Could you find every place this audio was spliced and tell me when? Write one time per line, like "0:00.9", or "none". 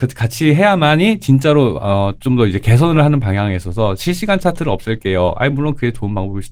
none